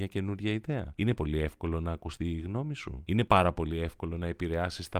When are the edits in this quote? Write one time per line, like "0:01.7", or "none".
0:01.2